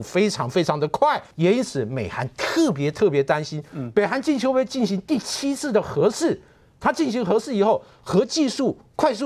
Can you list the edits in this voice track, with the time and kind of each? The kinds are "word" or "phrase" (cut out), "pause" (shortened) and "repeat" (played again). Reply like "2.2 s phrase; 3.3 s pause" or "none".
1.3 s pause